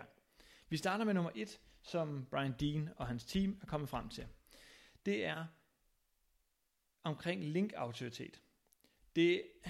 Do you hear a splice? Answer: no; 0 cuts

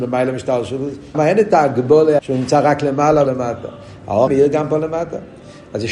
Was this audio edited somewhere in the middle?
yes; 4 cuts; at 1.1 s, 2.2 s, 3.3 s, 4.3 s

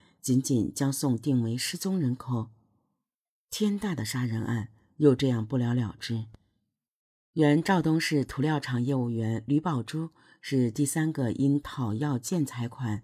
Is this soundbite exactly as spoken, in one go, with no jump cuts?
yes; 0 cuts

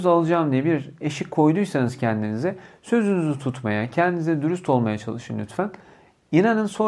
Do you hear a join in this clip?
no; 0 cuts

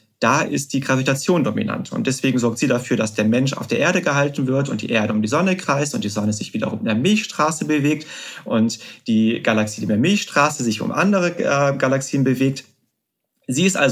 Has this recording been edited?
no; 0 cuts

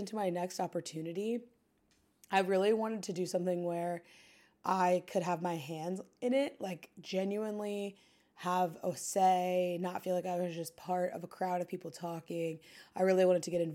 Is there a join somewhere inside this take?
no; 0 cuts

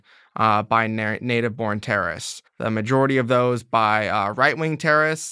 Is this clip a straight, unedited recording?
no; 1 cut; at 2.5 s

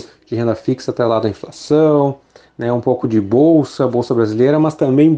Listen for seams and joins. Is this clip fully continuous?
yes; 0 cuts

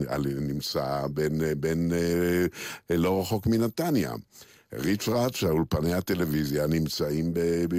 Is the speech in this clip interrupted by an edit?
no; 0 cuts

